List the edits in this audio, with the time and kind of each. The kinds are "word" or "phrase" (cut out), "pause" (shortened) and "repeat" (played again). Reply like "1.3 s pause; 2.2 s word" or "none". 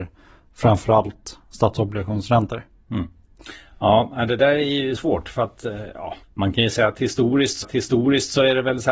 5.0 s word; 6.2 s pause; 7.6 s repeat